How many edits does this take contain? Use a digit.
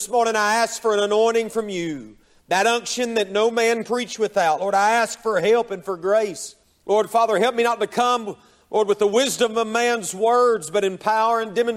2